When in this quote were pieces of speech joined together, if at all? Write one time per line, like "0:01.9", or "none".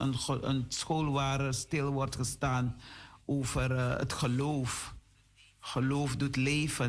none